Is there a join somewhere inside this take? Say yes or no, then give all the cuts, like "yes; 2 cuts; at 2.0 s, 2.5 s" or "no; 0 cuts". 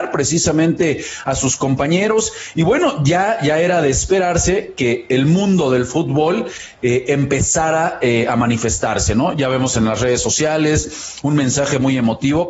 no; 0 cuts